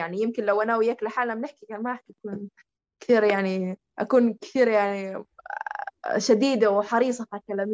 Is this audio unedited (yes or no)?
yes